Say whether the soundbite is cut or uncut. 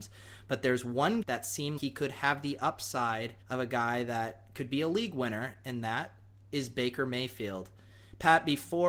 cut